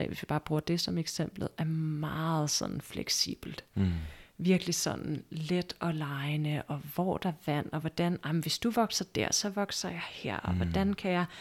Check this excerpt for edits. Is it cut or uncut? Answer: uncut